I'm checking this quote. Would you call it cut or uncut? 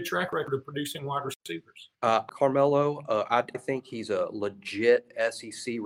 cut